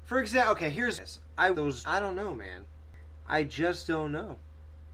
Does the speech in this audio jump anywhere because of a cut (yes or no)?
yes